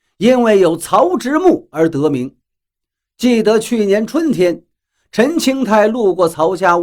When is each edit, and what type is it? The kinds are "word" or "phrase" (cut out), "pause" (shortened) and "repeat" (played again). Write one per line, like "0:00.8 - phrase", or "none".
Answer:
none